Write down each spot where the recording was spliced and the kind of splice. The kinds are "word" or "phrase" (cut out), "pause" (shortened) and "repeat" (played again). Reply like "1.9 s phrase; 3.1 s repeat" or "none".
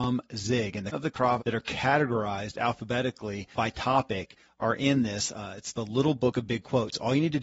0.9 s word; 1.4 s phrase; 3.5 s word